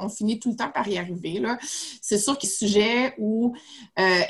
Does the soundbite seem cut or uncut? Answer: cut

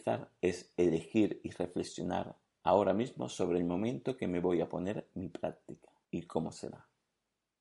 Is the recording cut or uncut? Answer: uncut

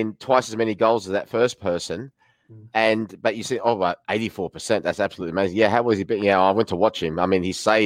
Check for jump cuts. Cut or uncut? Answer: uncut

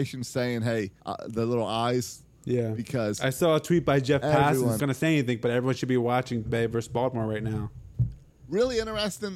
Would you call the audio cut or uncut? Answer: cut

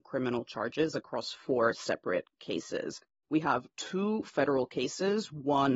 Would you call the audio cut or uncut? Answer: uncut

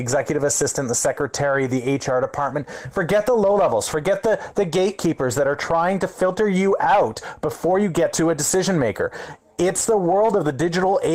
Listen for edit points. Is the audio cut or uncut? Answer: uncut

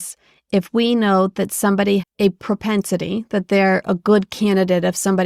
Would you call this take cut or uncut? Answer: cut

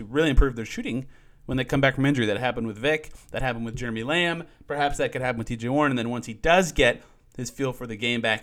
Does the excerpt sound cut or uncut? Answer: uncut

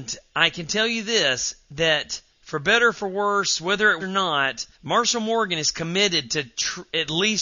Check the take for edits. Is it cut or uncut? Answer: cut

